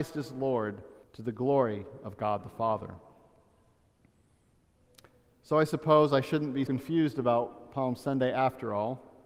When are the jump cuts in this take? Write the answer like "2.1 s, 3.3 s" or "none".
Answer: 1.0 s, 6.7 s